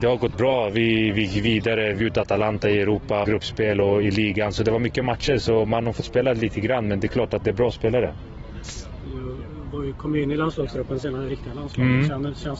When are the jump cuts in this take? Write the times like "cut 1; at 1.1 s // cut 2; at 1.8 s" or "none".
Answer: cut 1; at 2.0 s // cut 2; at 3.2 s // cut 3; at 7.4 s